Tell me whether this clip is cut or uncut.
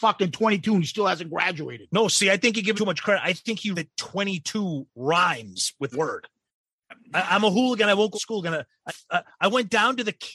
cut